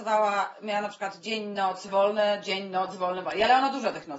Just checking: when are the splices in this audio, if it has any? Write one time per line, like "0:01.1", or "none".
0:01.9